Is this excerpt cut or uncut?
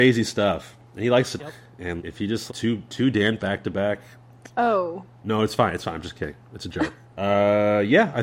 cut